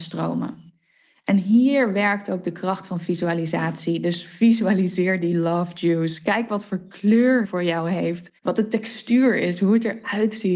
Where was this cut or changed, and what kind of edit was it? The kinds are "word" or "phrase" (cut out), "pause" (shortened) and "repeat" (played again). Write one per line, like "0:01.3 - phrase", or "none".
0:07.4 - word
0:08.4 - pause

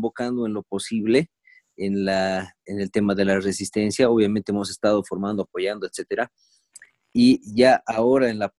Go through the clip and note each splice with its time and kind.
none

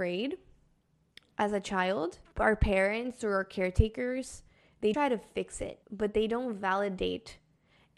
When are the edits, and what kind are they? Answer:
0:04.9 - word
0:05.8 - pause

